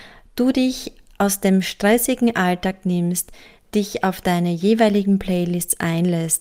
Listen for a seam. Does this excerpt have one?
no; 0 cuts

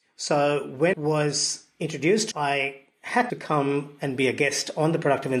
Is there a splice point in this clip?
yes; 3 cuts; at 0.9 s, 2.3 s, 3.3 s

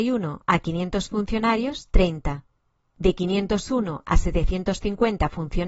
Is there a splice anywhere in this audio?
no; 0 cuts

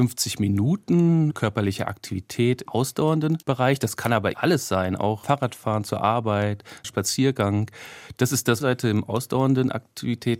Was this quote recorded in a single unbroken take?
no; 7 cuts; at 1.3 s, 2.7 s, 3.4 s, 4.3 s, 5.2 s, 6.8 s, 8.6 s

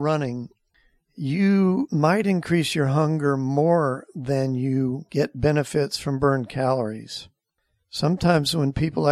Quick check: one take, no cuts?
yes; 0 cuts

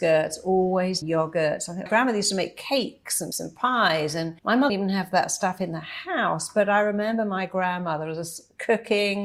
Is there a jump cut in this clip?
yes; 5 cuts; at 1.0 s, 1.9 s, 3.3 s, 4.4 s, 4.7 s

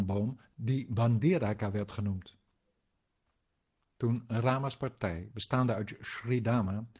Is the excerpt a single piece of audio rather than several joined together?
yes; 0 cuts

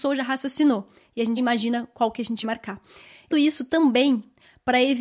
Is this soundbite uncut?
no; 3 cuts; at 1.4 s, 2.4 s, 3.3 s

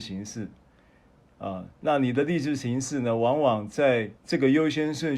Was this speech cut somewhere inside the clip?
yes; 2 cuts; at 1.7 s, 4.2 s

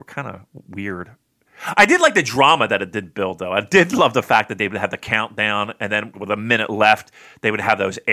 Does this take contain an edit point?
yes; 1 cut; at 6.1 s

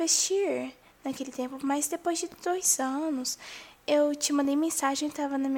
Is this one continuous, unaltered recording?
no; 1 cut; at 3.8 s

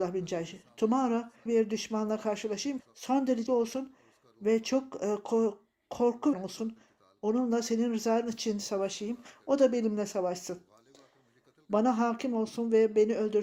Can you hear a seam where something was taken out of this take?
yes; 4 cuts; at 1.5 s, 2.8 s, 3.5 s, 6.3 s

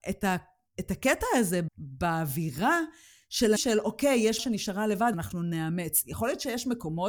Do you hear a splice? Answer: yes; 4 cuts; at 1.7 s, 3.6 s, 4.4 s, 5.1 s

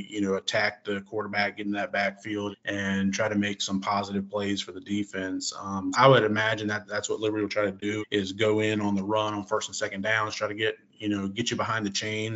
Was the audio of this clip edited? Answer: yes; 3 cuts; at 2.5 s, 5.9 s, 8.0 s

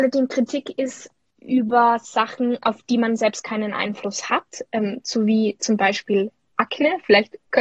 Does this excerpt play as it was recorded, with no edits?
yes; 0 cuts

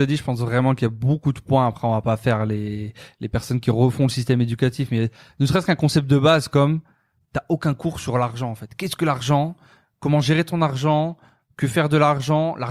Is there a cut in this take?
no; 0 cuts

